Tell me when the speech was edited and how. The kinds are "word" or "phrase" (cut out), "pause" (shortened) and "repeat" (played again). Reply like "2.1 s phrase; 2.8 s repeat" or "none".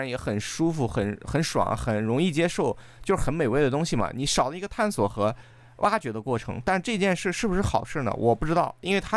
none